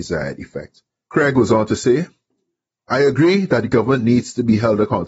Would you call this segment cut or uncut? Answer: uncut